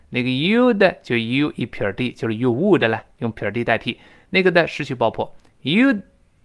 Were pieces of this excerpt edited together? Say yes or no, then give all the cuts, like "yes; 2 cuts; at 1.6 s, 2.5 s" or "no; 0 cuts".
no; 0 cuts